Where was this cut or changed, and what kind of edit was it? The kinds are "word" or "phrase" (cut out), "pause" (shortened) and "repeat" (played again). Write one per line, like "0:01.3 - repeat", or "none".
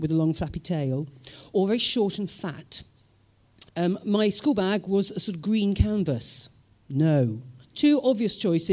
0:03.7 - pause
0:07.6 - pause